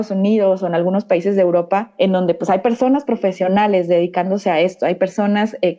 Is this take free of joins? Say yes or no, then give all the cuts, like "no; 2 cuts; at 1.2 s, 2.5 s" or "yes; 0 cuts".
yes; 0 cuts